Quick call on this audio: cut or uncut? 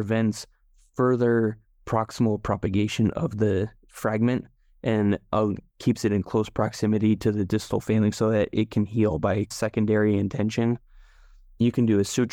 uncut